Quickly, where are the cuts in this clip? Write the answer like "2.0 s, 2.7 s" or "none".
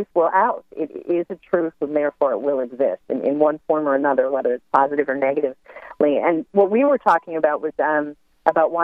none